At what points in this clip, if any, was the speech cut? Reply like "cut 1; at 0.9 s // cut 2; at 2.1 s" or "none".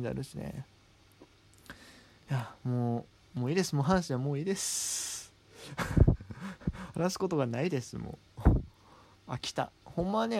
none

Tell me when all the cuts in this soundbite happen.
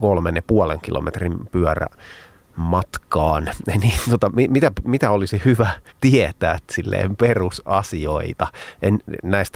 cut 1; at 5.9 s

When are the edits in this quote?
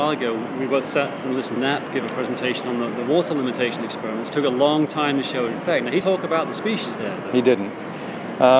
cut 1; at 1.6 s // cut 2; at 4.3 s // cut 3; at 6.0 s

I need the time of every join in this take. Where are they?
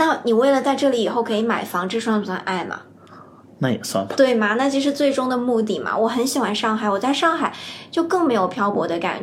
none

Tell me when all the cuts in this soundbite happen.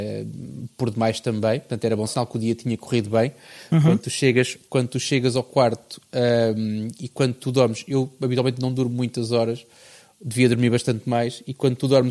cut 1; at 2.1 s

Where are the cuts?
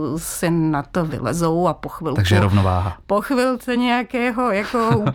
none

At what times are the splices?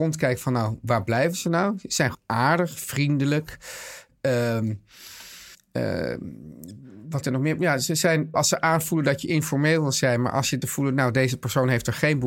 cut 1; at 2.1 s // cut 2; at 5.5 s // cut 3; at 7.2 s // cut 4; at 8.3 s // cut 5; at 10.6 s

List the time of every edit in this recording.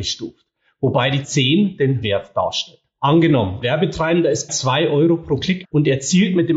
cut 1; at 1.2 s // cut 2; at 2.0 s // cut 3; at 3.6 s // cut 4; at 4.5 s // cut 5; at 5.6 s

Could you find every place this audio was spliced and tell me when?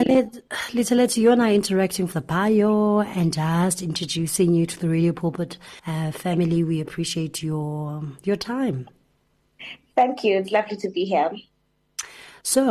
cut 1; at 2.1 s // cut 2; at 5.8 s

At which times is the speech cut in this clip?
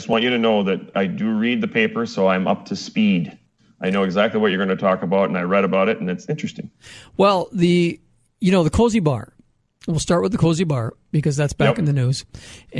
cut 1; at 0.9 s

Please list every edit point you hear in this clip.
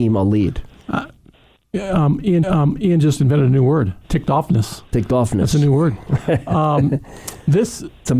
cut 1; at 2.4 s // cut 2; at 4.0 s // cut 3; at 4.9 s

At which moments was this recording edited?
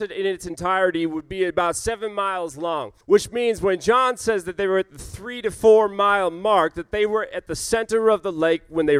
cut 1; at 3.0 s

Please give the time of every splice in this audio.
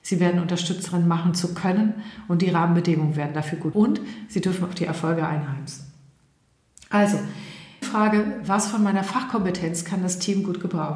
cut 1; at 3.7 s // cut 2; at 7.8 s

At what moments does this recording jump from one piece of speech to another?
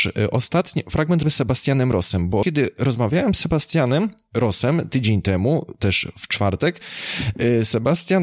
cut 1; at 1.2 s // cut 2; at 2.4 s

